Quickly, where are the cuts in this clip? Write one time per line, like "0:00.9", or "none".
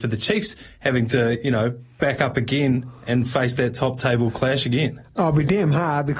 none